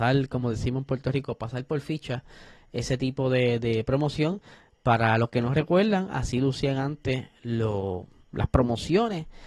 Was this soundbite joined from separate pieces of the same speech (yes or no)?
no